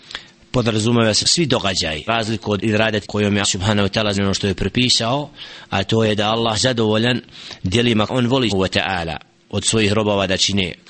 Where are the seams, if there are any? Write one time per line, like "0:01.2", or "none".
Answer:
0:01.2
0:02.1
0:02.6
0:03.0
0:03.4
0:04.1
0:06.5
0:08.1
0:08.5